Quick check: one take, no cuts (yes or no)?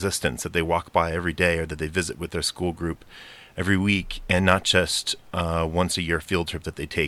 yes